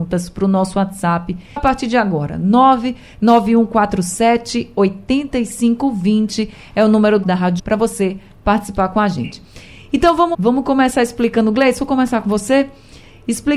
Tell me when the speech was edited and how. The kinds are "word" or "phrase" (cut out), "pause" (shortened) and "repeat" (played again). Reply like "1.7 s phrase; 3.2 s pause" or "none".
1.6 s word; 7.2 s word; 7.6 s word; 10.3 s word